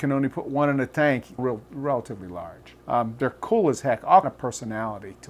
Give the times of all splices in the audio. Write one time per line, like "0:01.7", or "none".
0:01.4
0:02.8
0:04.2